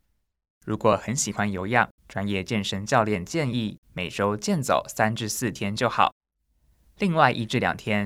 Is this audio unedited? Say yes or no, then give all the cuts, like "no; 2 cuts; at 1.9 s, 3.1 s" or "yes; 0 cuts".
no; 2 cuts; at 2.0 s, 3.8 s